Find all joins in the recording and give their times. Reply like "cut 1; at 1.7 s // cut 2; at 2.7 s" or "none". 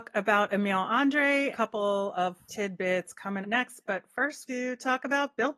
cut 1; at 1.5 s // cut 2; at 2.5 s // cut 3; at 3.4 s // cut 4; at 4.5 s